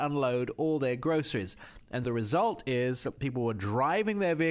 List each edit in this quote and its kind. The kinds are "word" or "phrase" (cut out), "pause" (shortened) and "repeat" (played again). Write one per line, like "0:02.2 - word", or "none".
0:02.0 - word